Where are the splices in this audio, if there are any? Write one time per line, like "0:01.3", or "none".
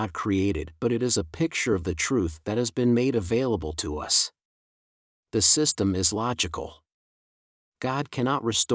none